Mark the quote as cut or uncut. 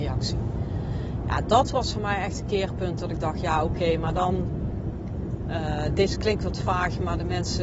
uncut